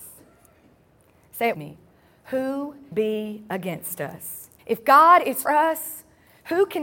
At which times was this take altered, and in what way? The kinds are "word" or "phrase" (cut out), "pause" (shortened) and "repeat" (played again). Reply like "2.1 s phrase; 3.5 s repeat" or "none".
1.5 s word; 2.9 s word; 4.6 s pause; 5.5 s word